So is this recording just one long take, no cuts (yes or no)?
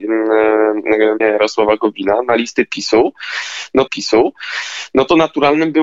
no